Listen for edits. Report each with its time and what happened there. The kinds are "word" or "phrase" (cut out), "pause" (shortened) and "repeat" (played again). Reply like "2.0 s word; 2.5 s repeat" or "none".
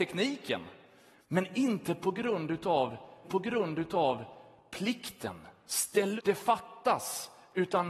1.1 s pause; 3.2 s repeat; 6.2 s word